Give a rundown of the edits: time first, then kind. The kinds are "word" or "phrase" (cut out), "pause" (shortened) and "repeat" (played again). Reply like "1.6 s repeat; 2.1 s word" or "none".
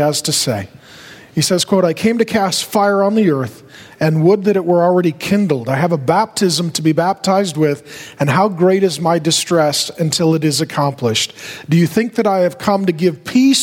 none